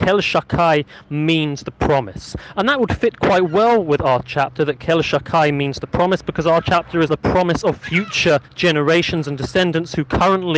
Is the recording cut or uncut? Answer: cut